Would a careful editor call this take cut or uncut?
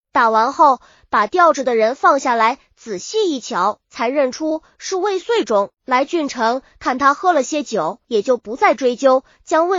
cut